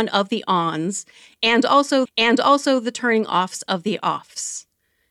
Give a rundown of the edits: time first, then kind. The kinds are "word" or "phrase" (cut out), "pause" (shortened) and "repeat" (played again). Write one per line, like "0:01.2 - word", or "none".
0:02.1 - repeat